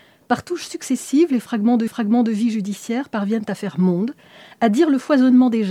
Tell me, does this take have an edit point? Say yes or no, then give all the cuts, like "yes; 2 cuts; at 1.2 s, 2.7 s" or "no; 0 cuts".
yes; 1 cut; at 1.9 s